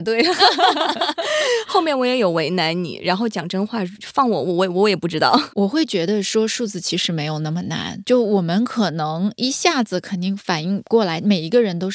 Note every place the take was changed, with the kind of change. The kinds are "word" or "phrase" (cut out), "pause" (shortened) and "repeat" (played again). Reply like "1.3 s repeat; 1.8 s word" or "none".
8.0 s word